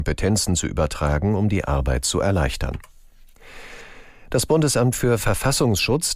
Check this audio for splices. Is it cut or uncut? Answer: uncut